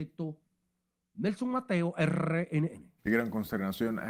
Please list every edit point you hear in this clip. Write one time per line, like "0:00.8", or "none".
0:03.0